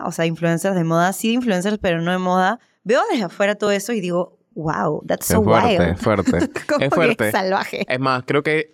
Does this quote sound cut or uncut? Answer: uncut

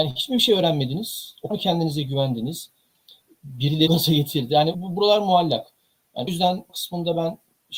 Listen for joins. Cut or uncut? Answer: cut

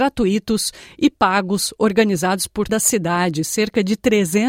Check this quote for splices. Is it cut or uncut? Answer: cut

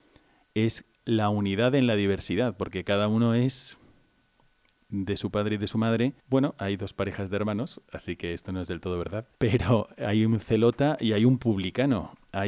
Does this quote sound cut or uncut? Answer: cut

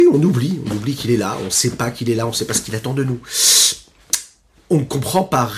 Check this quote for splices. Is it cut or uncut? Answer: uncut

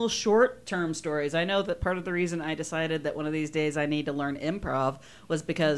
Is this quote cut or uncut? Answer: uncut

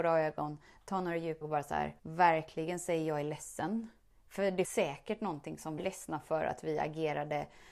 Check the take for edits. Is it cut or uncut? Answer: cut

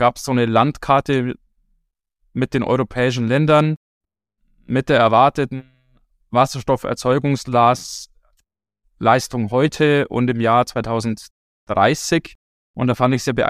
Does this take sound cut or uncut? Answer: uncut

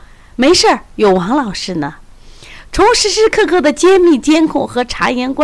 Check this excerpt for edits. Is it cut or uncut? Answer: cut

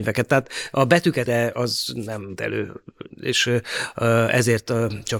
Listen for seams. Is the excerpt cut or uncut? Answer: cut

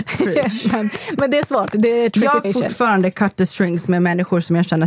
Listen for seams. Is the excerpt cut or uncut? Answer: cut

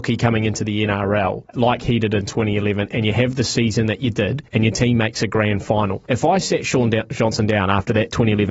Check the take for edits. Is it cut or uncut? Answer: cut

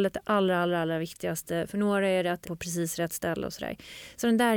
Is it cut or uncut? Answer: cut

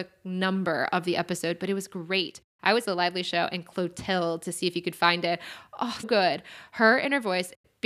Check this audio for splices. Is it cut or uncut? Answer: cut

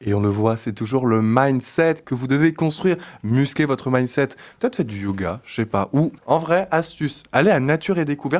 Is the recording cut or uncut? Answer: cut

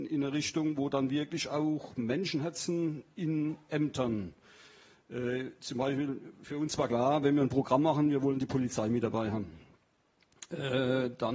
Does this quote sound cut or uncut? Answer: uncut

